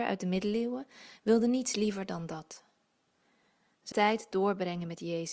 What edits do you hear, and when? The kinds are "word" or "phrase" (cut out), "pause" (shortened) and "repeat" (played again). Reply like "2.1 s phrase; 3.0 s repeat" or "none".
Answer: 3.9 s word

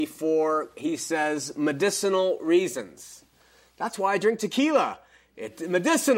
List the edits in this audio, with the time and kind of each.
none

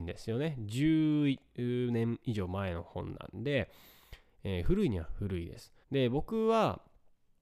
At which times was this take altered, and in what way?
5.8 s pause

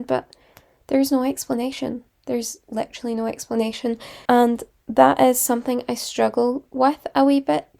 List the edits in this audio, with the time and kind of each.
4.2 s pause

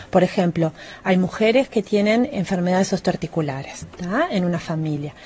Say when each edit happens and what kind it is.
3.8 s word

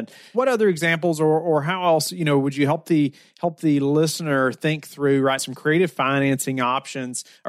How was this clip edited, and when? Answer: 5.4 s word

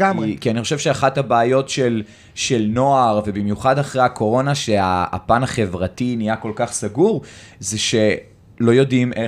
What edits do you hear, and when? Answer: none

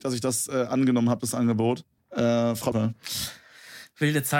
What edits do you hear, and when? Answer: 2.0 s pause; 2.7 s phrase

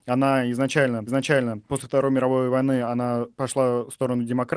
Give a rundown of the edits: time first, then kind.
1.1 s repeat

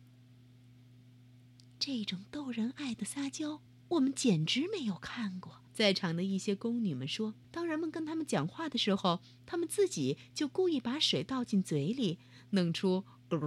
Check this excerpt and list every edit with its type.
3.7 s pause; 5.7 s pause; 7.4 s pause

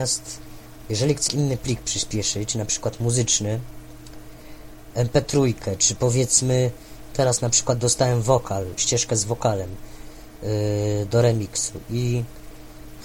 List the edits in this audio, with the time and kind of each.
1.3 s word; 8.8 s word

